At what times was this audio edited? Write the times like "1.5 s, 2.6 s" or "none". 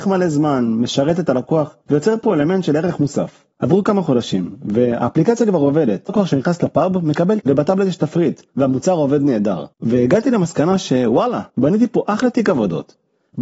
1.8 s, 3.5 s, 6.1 s, 7.4 s, 8.5 s, 9.7 s, 11.5 s